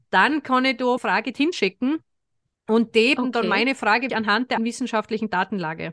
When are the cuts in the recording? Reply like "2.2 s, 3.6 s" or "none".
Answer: 1.0 s, 1.3 s, 3.2 s, 4.1 s, 4.6 s